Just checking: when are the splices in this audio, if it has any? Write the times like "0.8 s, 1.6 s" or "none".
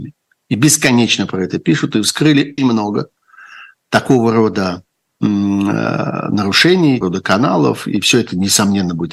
2.6 s, 7.0 s